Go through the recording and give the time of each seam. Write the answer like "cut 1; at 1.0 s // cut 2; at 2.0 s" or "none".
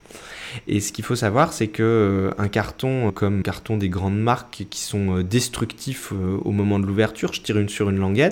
cut 1; at 3.1 s // cut 2; at 3.4 s

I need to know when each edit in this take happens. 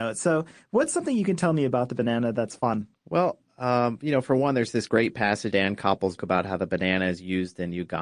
cut 1; at 3.0 s // cut 2; at 5.5 s // cut 3; at 6.2 s

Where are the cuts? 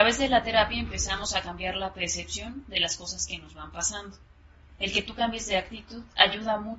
none

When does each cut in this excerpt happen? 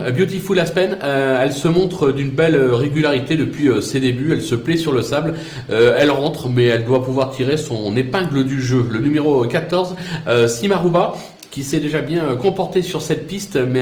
none

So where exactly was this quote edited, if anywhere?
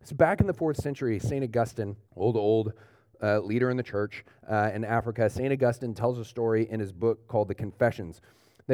cut 1; at 2.0 s

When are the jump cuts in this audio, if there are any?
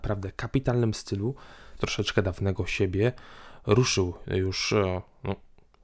cut 1; at 1.8 s

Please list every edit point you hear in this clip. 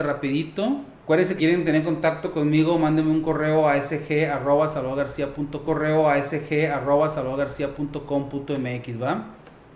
cut 1; at 1.0 s // cut 2; at 1.4 s // cut 3; at 5.6 s

